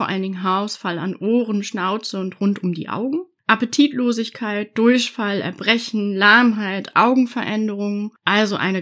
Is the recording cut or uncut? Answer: uncut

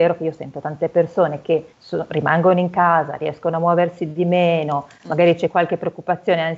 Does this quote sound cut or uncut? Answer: cut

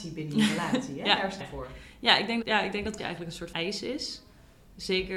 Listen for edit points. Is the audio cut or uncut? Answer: cut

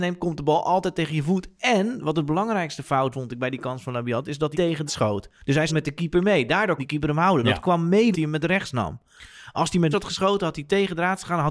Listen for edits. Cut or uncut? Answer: cut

